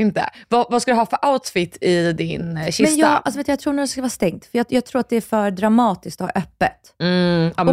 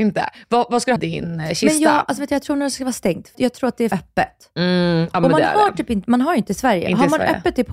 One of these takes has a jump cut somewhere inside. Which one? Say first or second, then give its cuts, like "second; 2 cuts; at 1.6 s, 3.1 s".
second; 4 cuts; at 1.0 s, 3.3 s, 3.9 s, 6.5 s